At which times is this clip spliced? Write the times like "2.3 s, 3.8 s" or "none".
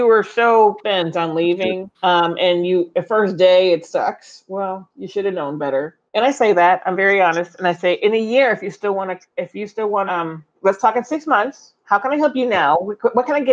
1.9 s, 6.1 s, 10.1 s, 10.5 s